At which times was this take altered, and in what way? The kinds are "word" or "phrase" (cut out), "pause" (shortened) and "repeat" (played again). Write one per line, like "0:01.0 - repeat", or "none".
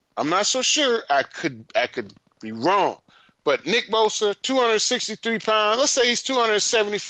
none